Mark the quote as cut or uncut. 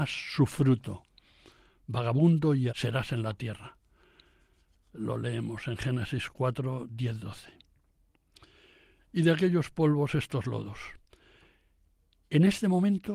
cut